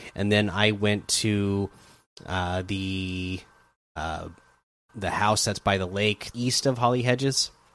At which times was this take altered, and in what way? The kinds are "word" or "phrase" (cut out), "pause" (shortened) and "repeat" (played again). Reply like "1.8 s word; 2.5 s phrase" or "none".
4.9 s word; 6.3 s word